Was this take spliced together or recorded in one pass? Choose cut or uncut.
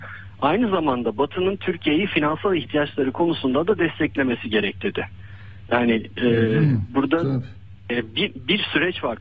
uncut